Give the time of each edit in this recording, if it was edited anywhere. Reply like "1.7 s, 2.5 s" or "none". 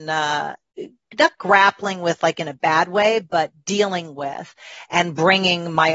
none